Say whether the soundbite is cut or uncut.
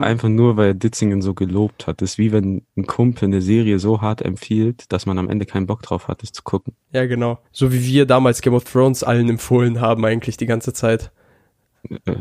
cut